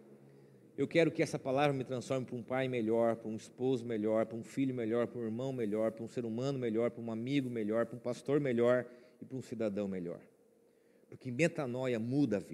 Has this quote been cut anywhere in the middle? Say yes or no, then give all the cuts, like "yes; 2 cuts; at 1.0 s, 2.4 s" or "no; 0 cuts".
no; 0 cuts